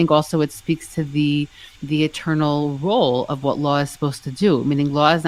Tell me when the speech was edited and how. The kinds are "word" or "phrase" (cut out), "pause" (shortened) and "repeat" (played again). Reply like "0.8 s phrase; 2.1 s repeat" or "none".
1.8 s pause